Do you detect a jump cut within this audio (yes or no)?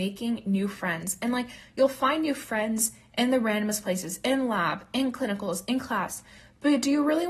no